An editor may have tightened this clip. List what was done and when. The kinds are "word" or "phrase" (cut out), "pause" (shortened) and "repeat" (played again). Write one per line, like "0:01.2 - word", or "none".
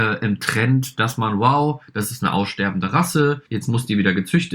0:03.5 - pause